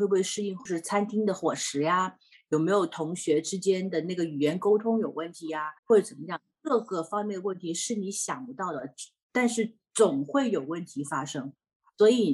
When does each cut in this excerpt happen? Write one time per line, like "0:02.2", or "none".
0:05.8